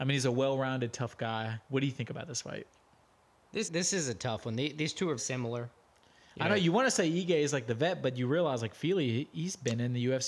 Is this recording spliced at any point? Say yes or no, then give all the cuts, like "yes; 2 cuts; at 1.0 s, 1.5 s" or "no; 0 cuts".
yes; 3 cuts; at 1.6 s, 3.6 s, 5.2 s